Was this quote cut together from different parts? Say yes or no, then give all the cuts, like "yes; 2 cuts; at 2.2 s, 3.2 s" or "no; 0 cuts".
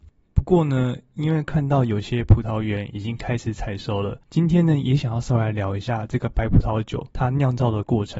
yes; 2 cuts; at 4.2 s, 7.1 s